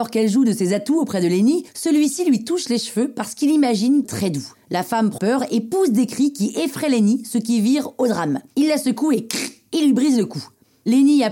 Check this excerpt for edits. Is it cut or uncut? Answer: cut